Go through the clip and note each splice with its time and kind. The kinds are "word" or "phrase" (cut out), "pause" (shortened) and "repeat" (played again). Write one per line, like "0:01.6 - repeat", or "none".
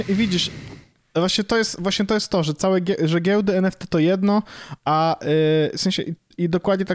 none